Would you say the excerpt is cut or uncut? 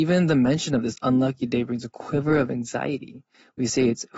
uncut